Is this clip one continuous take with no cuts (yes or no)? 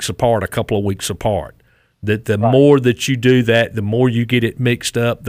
yes